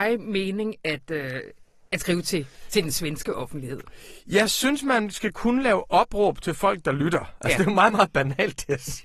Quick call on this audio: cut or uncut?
uncut